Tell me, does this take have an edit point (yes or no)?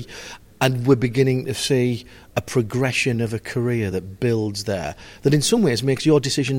no